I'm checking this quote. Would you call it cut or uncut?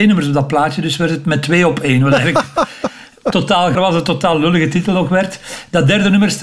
cut